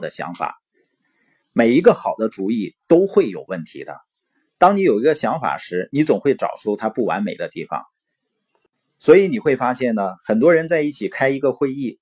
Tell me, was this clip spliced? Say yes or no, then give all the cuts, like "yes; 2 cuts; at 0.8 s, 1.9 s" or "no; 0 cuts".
no; 0 cuts